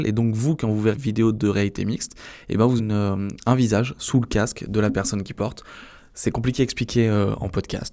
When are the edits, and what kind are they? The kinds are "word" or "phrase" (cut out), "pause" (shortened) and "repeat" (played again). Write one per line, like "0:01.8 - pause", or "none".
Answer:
0:00.9 - word
0:02.8 - word